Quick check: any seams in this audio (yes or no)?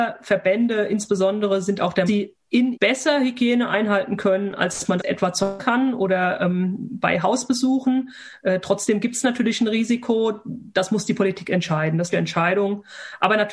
yes